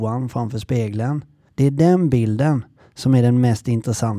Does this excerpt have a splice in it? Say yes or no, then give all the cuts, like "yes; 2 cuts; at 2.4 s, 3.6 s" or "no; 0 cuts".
no; 0 cuts